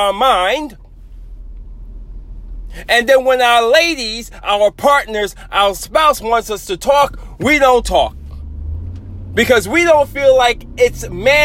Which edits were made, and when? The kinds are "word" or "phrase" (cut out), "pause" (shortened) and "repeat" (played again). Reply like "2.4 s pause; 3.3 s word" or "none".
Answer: none